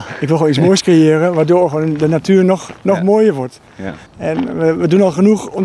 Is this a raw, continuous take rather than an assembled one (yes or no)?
no